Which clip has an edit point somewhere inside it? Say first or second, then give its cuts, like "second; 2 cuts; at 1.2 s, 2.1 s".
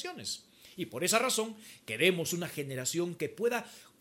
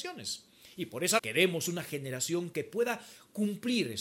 second; 1 cut; at 1.2 s